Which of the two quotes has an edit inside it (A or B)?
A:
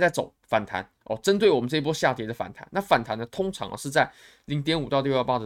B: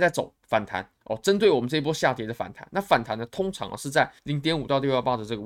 B